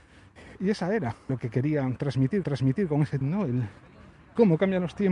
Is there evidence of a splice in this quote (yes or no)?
yes